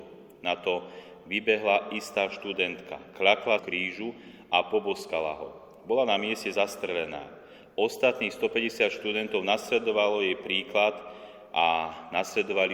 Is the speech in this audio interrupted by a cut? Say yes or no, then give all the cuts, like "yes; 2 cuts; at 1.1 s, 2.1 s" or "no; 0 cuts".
yes; 1 cut; at 3.6 s